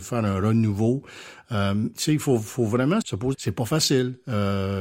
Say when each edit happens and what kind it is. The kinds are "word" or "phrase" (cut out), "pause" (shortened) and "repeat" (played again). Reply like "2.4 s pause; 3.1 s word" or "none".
1.9 s word; 3.0 s word; 3.3 s phrase